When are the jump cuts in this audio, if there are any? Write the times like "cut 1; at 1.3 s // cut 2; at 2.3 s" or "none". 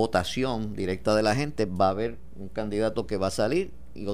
none